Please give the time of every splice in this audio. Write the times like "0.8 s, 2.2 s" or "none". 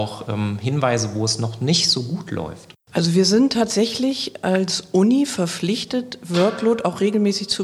2.8 s